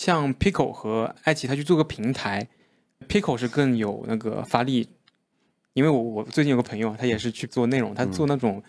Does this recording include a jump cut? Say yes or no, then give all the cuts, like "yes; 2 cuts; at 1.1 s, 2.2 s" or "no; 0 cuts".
yes; 2 cuts; at 3.0 s, 7.5 s